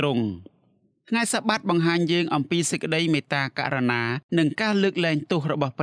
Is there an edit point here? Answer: yes; 1 cut; at 4.3 s

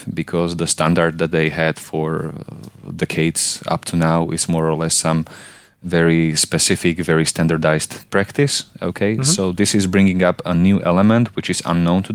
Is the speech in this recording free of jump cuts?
yes; 0 cuts

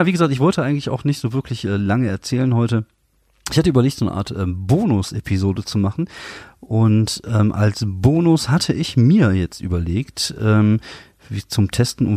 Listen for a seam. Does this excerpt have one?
no; 0 cuts

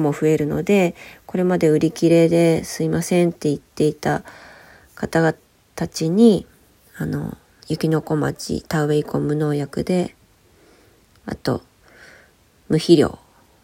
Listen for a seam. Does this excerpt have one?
no; 0 cuts

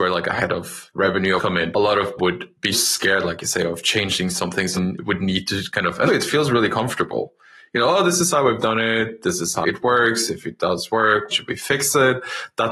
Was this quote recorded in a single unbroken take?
no; 8 cuts; at 1.4 s, 1.7 s, 2.2 s, 2.7 s, 4.7 s, 6.1 s, 9.6 s, 11.3 s

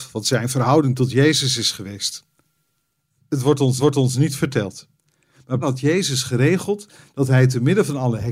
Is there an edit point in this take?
yes; 2 cuts; at 3.8 s, 5.6 s

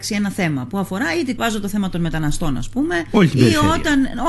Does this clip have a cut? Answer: yes; 1 cut; at 1.4 s

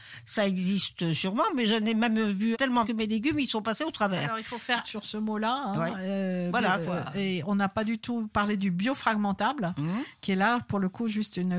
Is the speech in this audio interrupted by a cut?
yes; 4 cuts; at 2.5 s, 2.8 s, 4.8 s, 6.9 s

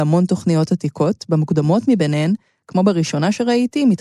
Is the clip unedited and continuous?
yes; 0 cuts

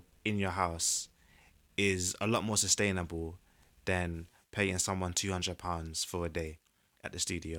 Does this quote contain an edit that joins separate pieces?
no; 0 cuts

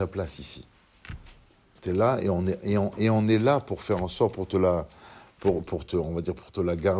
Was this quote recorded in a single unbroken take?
yes; 0 cuts

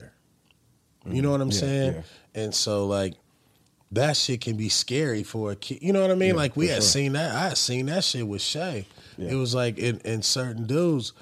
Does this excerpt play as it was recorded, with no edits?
yes; 0 cuts

